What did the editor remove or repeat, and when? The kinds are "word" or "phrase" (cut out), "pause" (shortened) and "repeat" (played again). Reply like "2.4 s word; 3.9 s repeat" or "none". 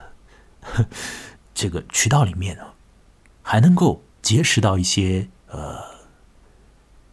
1.4 s pause; 4.1 s pause; 5.4 s pause